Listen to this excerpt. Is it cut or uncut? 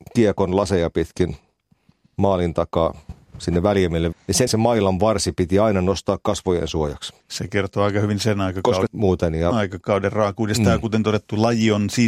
cut